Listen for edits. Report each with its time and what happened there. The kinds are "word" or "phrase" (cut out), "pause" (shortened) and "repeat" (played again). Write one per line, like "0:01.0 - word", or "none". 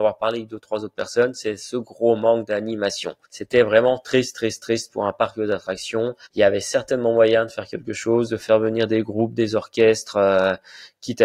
0:03.2 - pause
0:06.2 - pause